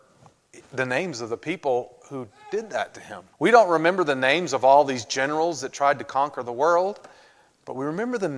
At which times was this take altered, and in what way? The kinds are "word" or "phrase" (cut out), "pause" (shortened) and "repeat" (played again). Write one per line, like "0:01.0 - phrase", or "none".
0:03.3 - pause